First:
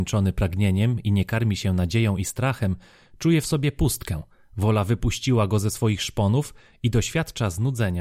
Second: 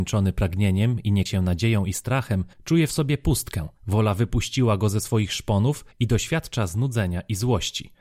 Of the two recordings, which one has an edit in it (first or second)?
second